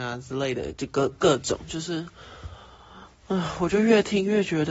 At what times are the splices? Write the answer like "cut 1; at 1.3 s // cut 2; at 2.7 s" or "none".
none